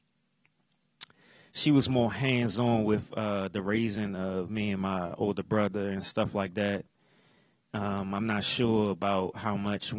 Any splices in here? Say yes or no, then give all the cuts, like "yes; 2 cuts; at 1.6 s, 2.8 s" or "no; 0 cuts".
no; 0 cuts